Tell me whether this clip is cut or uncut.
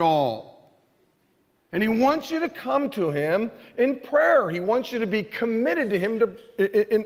uncut